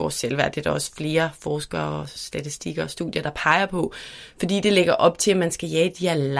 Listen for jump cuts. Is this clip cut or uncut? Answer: uncut